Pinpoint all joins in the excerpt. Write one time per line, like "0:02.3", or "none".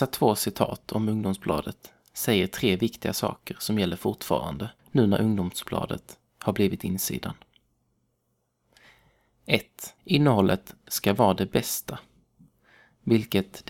0:04.8
0:10.0